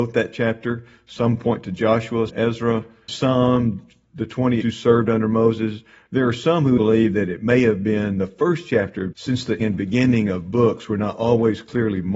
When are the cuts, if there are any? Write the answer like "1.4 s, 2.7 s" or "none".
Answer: 2.3 s, 3.1 s, 4.6 s, 6.8 s, 9.1 s, 9.6 s